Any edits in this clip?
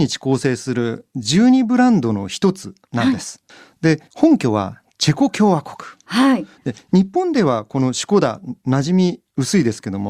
yes; 2 cuts; at 3.5 s, 4.1 s

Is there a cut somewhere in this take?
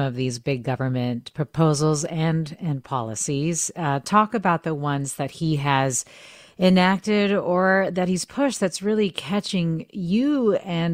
no; 0 cuts

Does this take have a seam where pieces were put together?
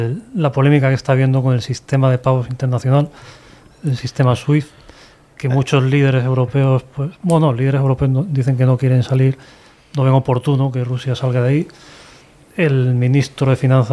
no; 0 cuts

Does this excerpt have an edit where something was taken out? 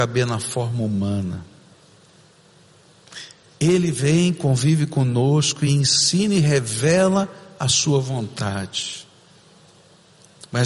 no; 0 cuts

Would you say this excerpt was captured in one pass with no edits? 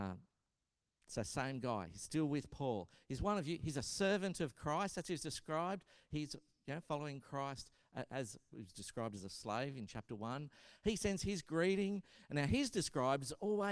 yes; 0 cuts

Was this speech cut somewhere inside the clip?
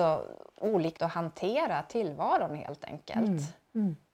yes; 1 cut; at 1.0 s

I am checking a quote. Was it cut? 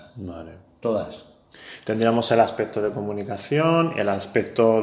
no; 0 cuts

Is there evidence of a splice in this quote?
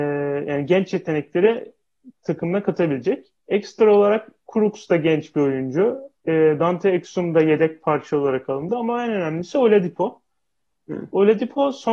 yes; 1 cut; at 3.4 s

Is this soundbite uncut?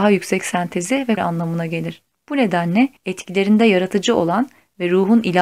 no; 2 cuts; at 1.2 s, 3.0 s

